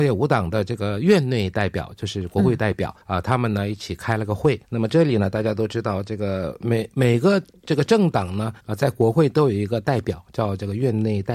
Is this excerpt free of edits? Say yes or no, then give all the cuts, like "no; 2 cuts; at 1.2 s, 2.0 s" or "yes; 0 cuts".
no; 3 cuts; at 3.0 s, 4.6 s, 8.6 s